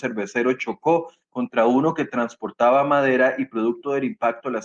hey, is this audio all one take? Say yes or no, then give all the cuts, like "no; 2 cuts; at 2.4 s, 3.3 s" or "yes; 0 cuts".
yes; 0 cuts